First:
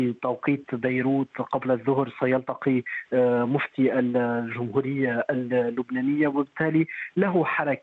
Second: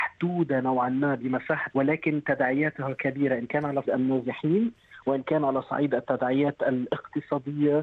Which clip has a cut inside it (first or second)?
second